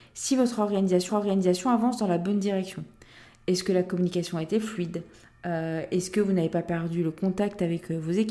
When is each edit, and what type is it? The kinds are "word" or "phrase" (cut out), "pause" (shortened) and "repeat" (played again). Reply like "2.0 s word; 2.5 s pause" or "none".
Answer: 1.1 s repeat